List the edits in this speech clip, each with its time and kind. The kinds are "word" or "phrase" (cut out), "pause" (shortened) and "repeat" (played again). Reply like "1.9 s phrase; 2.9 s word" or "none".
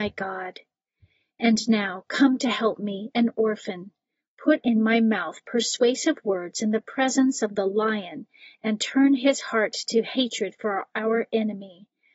none

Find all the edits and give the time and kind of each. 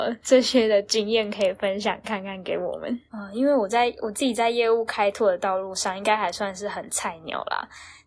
3.1 s pause

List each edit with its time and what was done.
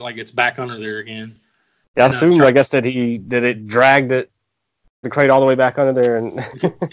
5.0 s word

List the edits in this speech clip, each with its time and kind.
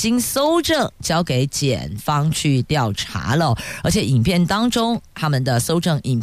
none

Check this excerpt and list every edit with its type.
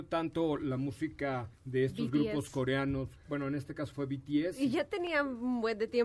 1.5 s pause

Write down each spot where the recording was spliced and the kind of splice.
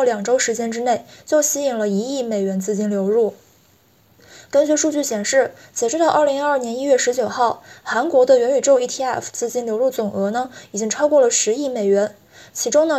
none

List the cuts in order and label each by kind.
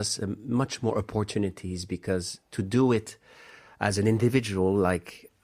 none

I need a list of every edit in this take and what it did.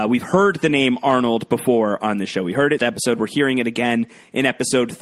2.8 s phrase

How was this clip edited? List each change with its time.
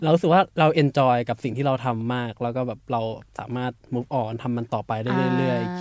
3.8 s pause

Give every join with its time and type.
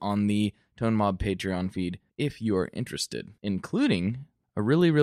2.1 s pause; 3.4 s pause

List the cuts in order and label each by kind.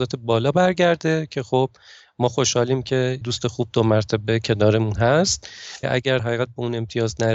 3.2 s word; 5.8 s word; 6.2 s word

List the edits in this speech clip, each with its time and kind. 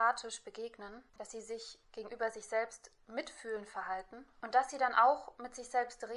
1.1 s pause

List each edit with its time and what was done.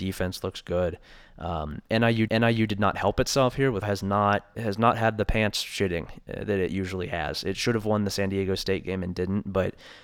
2.3 s repeat; 3.8 s phrase; 4.5 s word

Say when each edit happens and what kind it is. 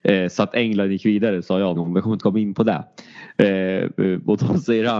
1.8 s word; 2.2 s phrase

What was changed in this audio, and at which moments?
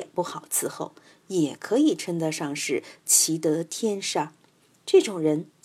none

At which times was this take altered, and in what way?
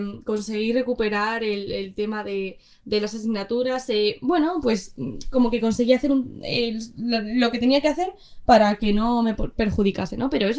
none

